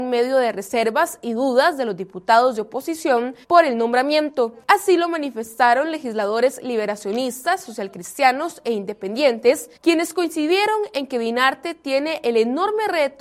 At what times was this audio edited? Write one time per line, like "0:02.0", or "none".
0:03.4
0:04.6
0:09.8